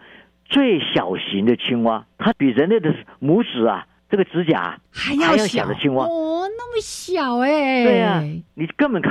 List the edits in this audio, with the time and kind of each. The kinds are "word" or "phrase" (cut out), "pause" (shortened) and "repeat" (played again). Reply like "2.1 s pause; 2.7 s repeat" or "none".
2.1 s pause; 4.8 s pause